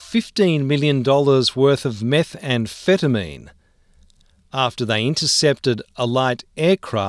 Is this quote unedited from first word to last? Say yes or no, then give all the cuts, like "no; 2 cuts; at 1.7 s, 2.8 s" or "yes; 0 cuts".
yes; 0 cuts